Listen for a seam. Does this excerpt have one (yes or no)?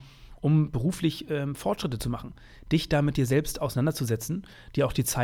no